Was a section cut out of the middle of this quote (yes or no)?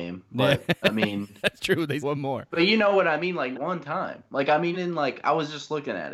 yes